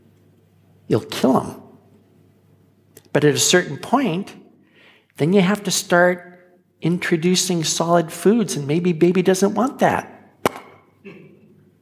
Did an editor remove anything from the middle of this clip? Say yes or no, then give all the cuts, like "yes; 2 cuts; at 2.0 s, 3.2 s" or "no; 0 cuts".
no; 0 cuts